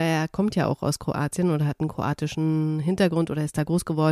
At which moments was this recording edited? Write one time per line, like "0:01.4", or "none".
none